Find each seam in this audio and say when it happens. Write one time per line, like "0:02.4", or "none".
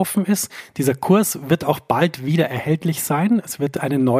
none